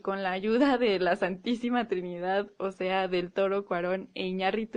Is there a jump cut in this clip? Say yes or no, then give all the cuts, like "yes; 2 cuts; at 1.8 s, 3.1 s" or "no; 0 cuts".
no; 0 cuts